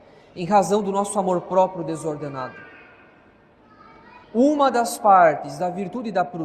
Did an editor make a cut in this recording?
yes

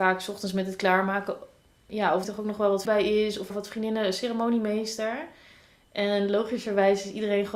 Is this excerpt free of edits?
no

